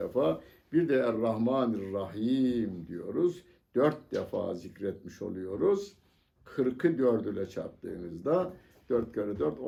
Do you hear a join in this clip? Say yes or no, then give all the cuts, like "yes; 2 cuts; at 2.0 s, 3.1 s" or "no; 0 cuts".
no; 0 cuts